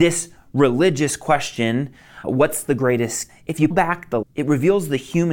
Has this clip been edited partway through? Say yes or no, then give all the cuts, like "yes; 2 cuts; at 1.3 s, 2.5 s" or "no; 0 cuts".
yes; 4 cuts; at 2.2 s, 3.3 s, 3.7 s, 4.2 s